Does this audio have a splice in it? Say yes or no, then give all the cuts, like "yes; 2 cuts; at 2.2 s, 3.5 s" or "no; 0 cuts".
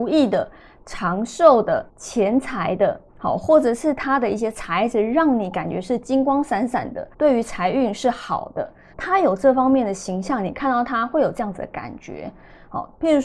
yes; 4 cuts; at 1.9 s, 3.1 s, 7.1 s, 8.9 s